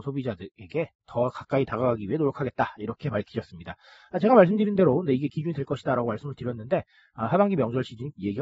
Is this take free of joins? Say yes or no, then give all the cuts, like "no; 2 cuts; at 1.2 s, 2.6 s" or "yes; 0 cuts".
yes; 0 cuts